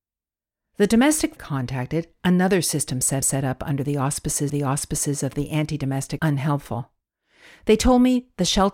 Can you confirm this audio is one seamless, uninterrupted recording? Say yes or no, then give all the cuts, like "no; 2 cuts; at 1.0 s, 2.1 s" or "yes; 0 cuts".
no; 4 cuts; at 1.4 s, 3.2 s, 4.5 s, 6.2 s